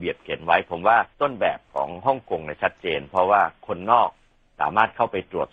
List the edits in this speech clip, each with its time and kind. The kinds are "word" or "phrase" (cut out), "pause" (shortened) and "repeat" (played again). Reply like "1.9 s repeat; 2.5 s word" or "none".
1.1 s pause